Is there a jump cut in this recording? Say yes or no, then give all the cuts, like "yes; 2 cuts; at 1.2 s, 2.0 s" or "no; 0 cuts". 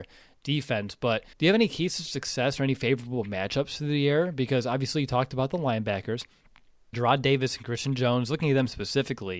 yes; 2 cuts; at 1.3 s, 6.9 s